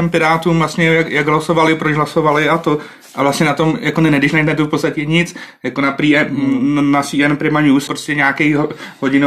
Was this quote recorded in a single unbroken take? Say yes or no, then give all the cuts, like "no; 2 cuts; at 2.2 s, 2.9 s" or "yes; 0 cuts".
no; 1 cut; at 7.9 s